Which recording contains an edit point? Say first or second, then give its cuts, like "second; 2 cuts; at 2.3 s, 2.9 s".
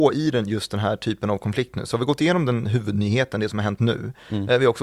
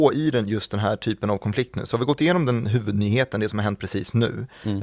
first; 1 cut; at 3.8 s